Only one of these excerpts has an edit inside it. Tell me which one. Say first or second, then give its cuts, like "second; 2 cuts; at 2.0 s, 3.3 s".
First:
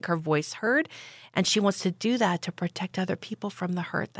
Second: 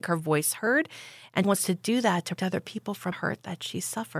second; 3 cuts; at 1.4 s, 2.4 s, 3.1 s